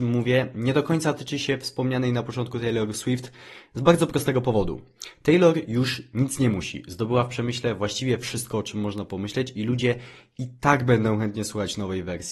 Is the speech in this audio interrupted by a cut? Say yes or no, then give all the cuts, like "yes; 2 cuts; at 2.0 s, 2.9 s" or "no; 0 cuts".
no; 0 cuts